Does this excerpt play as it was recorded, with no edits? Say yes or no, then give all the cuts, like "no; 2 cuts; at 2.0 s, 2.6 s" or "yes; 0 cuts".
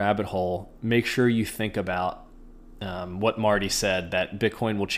yes; 0 cuts